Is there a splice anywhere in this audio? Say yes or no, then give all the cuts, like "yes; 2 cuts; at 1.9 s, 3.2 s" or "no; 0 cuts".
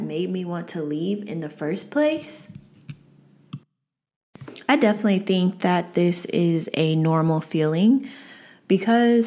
no; 0 cuts